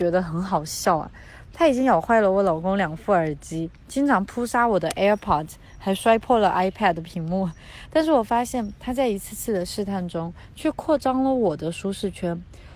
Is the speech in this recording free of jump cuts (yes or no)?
yes